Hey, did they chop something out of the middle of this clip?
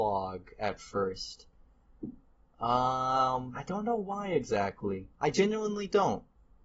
no; 0 cuts

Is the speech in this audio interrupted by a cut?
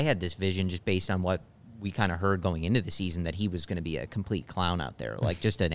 no; 0 cuts

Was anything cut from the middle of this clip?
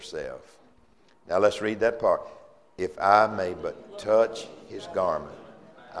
no; 0 cuts

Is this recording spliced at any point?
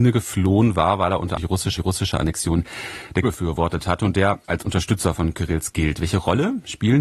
yes; 5 cuts; at 1.4 s, 1.8 s, 3.2 s, 4.4 s, 5.7 s

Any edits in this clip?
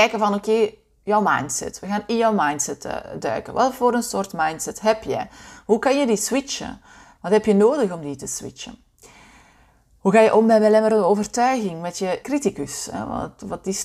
yes; 1 cut; at 12.2 s

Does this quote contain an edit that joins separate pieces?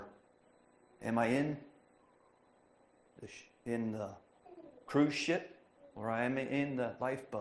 yes; 1 cut; at 5.8 s

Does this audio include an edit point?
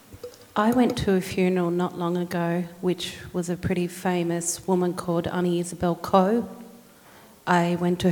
no; 0 cuts

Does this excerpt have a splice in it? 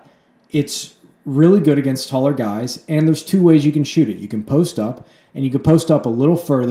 no; 0 cuts

